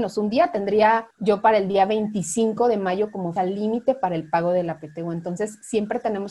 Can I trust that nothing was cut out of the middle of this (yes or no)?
no